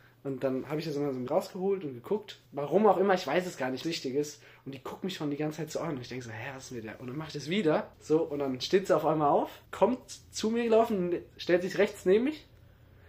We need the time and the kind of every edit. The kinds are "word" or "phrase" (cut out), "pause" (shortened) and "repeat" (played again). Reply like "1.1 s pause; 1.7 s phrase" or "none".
1.3 s word; 2.5 s pause; 3.8 s phrase; 7.9 s pause; 9.7 s pause